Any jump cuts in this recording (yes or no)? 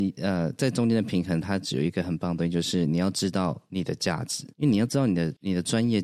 yes